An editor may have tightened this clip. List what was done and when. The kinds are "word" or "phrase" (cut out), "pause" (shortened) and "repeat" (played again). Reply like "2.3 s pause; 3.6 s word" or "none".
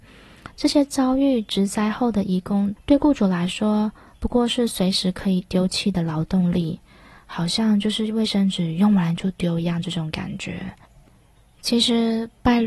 none